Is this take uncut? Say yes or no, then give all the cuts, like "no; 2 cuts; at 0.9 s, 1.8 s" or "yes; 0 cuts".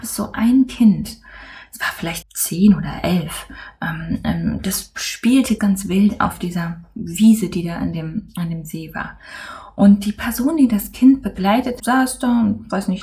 no; 3 cuts; at 2.2 s, 5.6 s, 11.8 s